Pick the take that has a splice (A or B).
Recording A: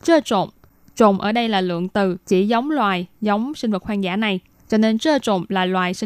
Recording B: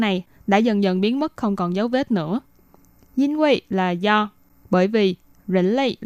A